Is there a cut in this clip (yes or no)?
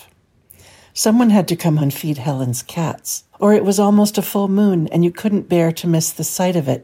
yes